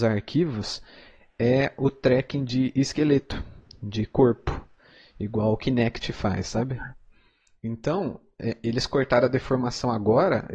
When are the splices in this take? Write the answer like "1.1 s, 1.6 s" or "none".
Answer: none

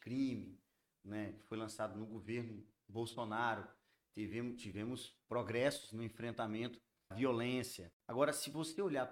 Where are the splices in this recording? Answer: 5.2 s, 7.1 s, 8.0 s

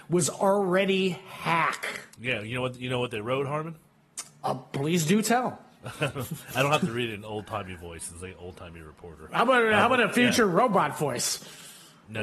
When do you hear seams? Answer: 2.1 s

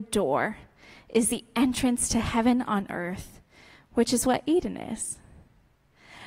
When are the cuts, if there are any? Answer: none

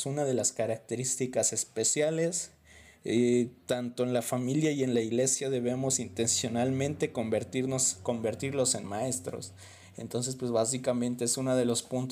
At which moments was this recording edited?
none

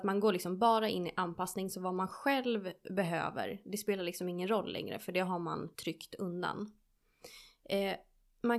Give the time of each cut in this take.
5.7 s

